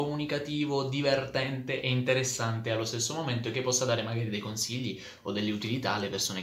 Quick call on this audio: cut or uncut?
uncut